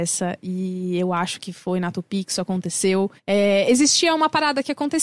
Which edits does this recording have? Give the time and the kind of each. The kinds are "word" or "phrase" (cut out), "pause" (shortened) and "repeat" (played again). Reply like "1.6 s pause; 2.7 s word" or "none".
3.2 s pause